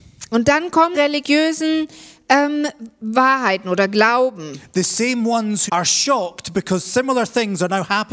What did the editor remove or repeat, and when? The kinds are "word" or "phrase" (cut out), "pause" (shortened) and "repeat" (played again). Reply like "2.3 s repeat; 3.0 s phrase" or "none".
0.9 s phrase; 5.7 s phrase